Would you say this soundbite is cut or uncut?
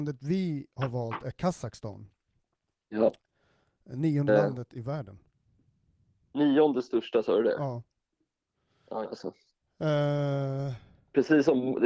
cut